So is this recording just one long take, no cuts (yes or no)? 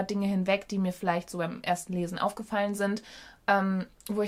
yes